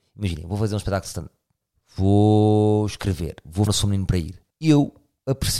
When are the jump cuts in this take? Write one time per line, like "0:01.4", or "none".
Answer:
0:01.6
0:03.7
0:04.5